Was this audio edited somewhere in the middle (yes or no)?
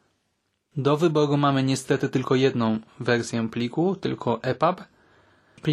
no